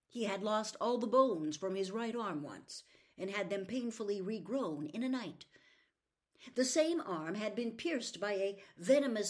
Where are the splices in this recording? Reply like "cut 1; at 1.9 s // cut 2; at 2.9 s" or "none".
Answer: none